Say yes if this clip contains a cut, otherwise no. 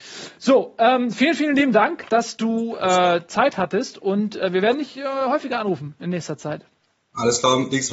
no